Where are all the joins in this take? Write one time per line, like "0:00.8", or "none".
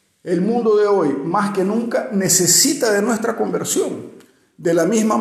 none